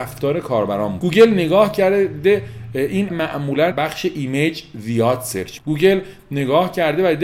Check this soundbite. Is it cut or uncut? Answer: cut